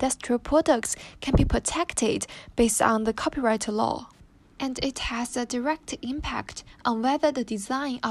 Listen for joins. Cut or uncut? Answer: cut